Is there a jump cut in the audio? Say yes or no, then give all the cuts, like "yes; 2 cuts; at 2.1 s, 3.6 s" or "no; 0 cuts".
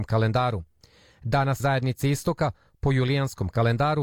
yes; 1 cut; at 1.6 s